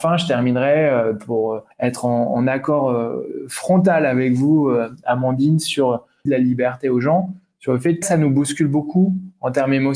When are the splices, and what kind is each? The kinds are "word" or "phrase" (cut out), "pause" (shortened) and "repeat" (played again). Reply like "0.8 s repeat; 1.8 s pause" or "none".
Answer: 1.7 s pause; 6.3 s word; 8.0 s phrase